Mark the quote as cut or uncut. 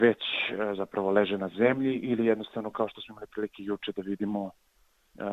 uncut